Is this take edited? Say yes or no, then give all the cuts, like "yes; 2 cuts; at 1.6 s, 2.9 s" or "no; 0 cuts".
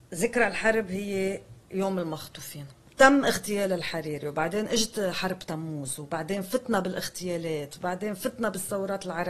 no; 0 cuts